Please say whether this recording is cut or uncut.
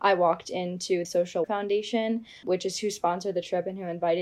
cut